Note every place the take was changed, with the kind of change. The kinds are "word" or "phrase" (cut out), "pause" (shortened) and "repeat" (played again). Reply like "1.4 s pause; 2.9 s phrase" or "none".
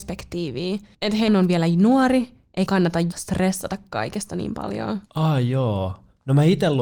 0.9 s pause; 1.3 s word; 2.7 s word; 3.1 s word; 5.1 s pause